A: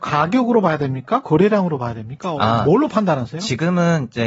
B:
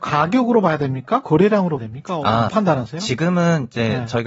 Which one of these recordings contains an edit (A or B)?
B